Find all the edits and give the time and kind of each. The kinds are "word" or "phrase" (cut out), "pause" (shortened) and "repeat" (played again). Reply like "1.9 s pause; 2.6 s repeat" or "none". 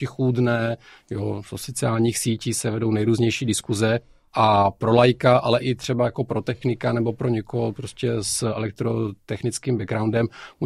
5.6 s word